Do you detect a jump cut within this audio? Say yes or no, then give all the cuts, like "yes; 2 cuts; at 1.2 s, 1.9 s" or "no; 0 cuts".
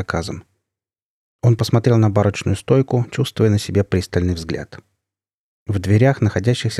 no; 0 cuts